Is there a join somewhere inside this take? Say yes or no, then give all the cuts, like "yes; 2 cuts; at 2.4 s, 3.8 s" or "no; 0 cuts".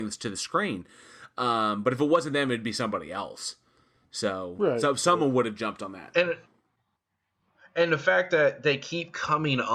no; 0 cuts